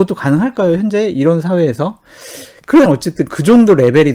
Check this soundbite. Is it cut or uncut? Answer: cut